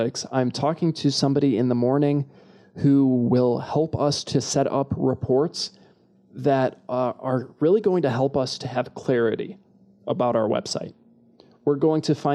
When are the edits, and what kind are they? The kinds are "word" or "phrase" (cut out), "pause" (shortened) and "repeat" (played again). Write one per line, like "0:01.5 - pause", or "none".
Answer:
none